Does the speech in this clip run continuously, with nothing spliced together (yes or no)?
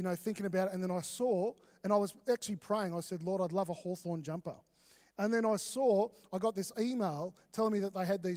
yes